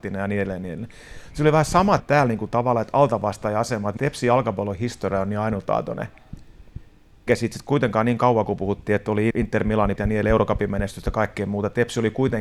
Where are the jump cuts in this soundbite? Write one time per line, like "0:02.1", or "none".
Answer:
0:02.0
0:04.0
0:07.3
0:09.3
0:10.0